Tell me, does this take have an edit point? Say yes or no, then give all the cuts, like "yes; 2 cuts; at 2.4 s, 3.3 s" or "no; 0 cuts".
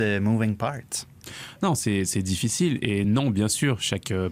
no; 0 cuts